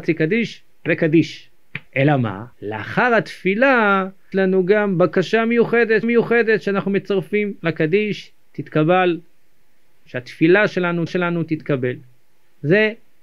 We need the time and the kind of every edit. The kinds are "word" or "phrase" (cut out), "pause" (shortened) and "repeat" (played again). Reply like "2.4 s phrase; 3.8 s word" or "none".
1.9 s pause; 2.5 s pause; 4.3 s word; 6.0 s repeat; 7.6 s pause; 10.1 s phrase; 11.1 s repeat